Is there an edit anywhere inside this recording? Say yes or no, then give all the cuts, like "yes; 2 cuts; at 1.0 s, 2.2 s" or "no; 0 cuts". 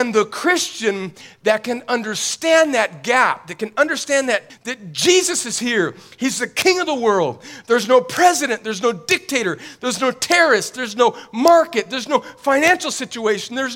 yes; 1 cut; at 4.5 s